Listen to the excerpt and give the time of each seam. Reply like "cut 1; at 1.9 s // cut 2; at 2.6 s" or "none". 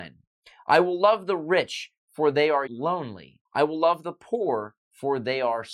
cut 1; at 2.7 s // cut 2; at 3.5 s